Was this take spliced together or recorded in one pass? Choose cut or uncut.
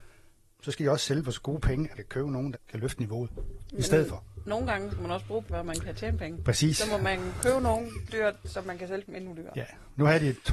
cut